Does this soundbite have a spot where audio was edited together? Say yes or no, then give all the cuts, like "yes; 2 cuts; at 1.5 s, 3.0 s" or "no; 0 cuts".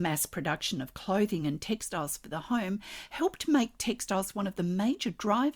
no; 0 cuts